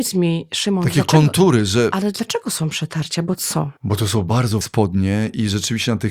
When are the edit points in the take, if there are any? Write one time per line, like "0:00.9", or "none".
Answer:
0:03.8
0:04.6